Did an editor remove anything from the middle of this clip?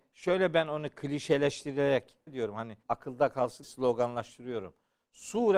yes; 3 cuts; at 2.3 s, 2.8 s, 3.6 s

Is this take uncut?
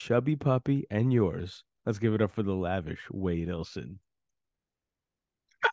yes; 0 cuts

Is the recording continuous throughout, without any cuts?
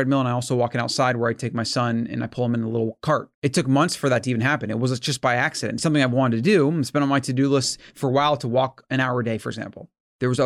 no; 1 cut; at 3.3 s

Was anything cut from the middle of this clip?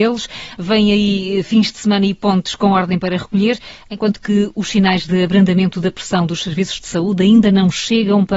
no; 0 cuts

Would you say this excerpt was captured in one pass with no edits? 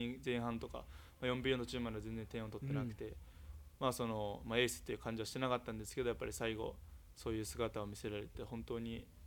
yes; 0 cuts

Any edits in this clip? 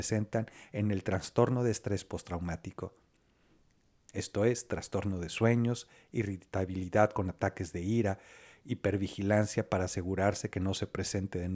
no; 0 cuts

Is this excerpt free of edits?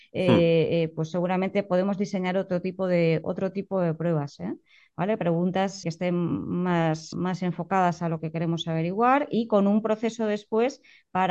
no; 2 cuts; at 5.8 s, 7.1 s

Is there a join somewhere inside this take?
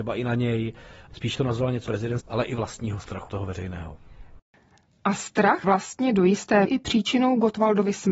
yes; 6 cuts; at 1.3 s, 1.9 s, 2.2 s, 3.3 s, 5.6 s, 6.6 s

